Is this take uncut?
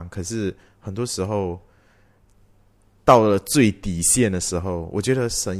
yes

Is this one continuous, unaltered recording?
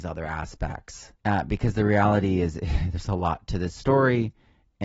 no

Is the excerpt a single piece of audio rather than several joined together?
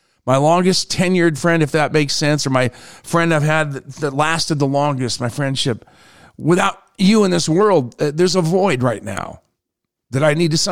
yes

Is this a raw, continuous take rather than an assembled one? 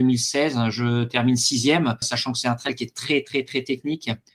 no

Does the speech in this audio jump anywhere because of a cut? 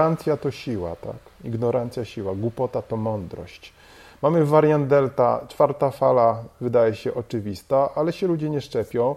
no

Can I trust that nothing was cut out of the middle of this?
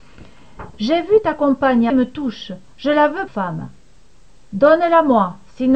no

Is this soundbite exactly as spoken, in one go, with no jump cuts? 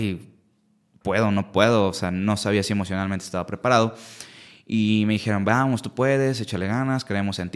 yes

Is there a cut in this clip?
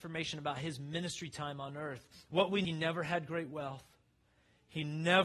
yes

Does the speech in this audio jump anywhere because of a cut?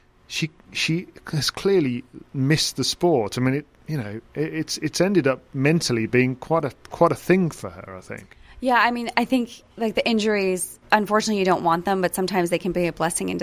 yes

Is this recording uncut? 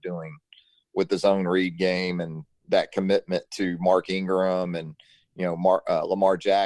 yes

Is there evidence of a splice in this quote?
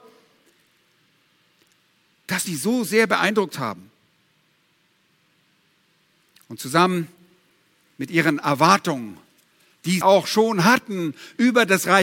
yes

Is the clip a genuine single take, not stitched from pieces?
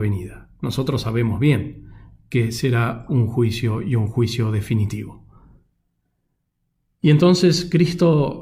yes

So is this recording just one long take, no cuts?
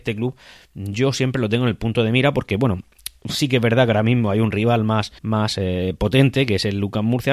no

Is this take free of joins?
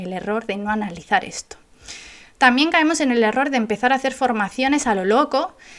yes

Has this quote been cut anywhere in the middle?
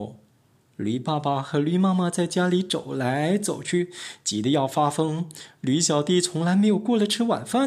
no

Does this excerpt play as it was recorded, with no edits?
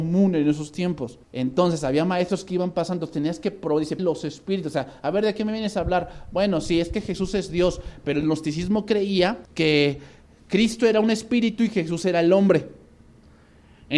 no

